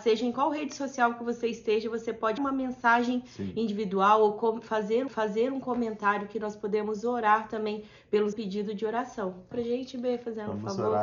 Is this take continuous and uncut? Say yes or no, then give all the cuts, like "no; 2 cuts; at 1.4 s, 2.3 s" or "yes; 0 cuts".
no; 4 cuts; at 2.4 s, 5.1 s, 8.3 s, 9.5 s